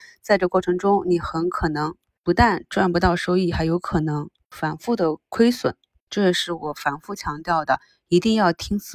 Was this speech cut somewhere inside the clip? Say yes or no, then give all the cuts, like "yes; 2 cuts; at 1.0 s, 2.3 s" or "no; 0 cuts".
no; 0 cuts